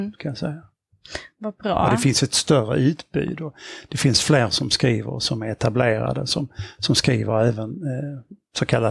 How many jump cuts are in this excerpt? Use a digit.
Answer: 1